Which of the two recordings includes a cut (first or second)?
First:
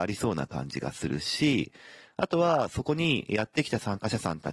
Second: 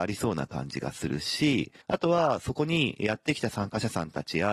second